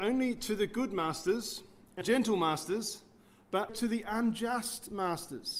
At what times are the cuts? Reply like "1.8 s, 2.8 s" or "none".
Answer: 2.0 s, 3.7 s

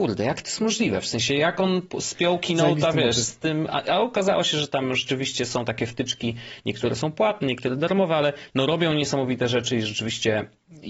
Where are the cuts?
none

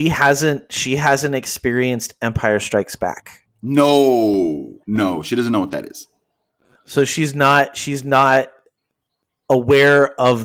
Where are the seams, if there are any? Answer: 4.8 s

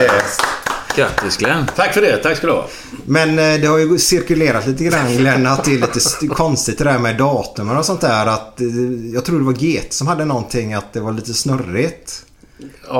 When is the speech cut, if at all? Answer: none

